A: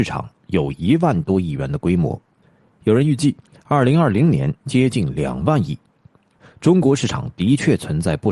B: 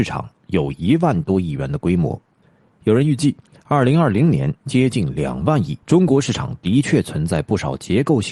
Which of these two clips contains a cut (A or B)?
B